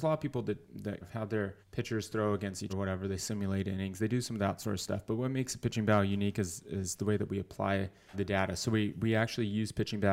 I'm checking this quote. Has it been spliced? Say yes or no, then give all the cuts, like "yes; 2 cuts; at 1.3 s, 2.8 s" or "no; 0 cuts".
yes; 4 cuts; at 1.0 s, 1.6 s, 2.7 s, 8.1 s